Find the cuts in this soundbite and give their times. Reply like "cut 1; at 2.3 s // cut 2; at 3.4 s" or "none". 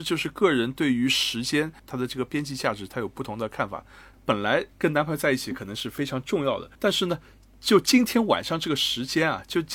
cut 1; at 4.7 s // cut 2; at 6.7 s